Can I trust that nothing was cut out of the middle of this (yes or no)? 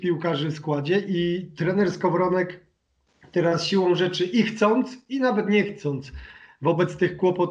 yes